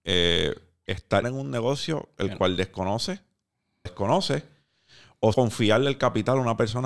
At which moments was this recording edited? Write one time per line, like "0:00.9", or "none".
0:01.2
0:03.9
0:05.3